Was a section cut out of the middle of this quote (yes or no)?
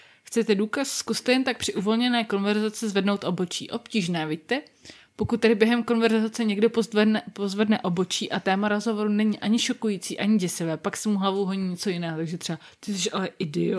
no